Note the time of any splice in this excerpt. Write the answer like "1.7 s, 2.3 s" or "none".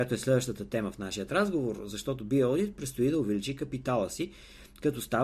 none